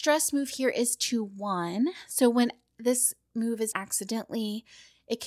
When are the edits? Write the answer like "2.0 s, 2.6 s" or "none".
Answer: 3.7 s